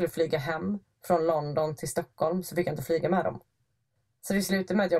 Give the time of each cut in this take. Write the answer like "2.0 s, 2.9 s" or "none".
none